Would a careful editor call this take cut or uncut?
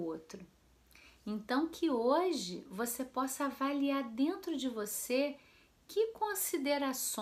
uncut